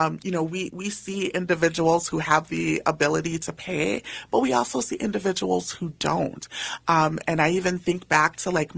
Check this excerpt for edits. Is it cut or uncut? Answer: uncut